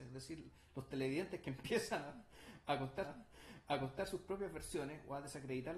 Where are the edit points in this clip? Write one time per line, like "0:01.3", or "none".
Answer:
0:03.0